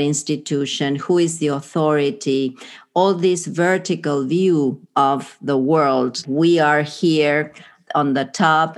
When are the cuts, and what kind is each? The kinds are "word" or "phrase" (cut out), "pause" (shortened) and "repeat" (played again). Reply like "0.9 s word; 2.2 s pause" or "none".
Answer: 4.8 s pause; 6.2 s word; 7.9 s word